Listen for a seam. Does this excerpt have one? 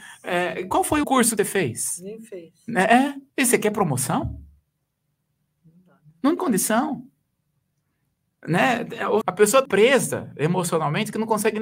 yes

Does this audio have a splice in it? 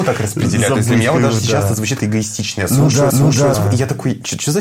yes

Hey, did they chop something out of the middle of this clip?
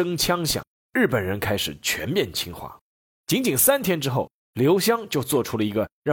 no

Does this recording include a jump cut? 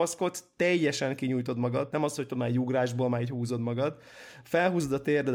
yes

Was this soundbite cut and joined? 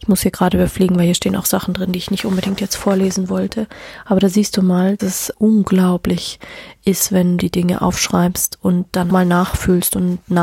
yes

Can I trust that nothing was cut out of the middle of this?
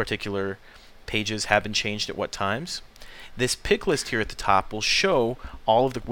yes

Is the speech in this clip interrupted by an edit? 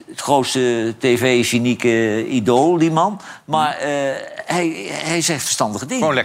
no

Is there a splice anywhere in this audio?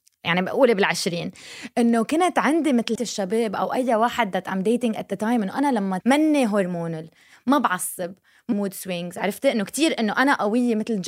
yes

